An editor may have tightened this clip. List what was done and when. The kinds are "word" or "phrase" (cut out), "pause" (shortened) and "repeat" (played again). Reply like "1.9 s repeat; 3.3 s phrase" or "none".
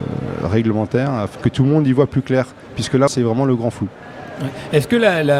1.4 s word; 3.1 s word